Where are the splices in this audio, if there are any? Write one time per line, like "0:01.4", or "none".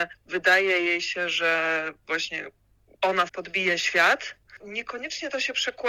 0:03.3
0:04.6